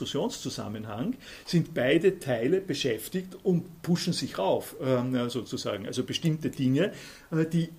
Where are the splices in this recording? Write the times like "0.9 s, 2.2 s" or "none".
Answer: none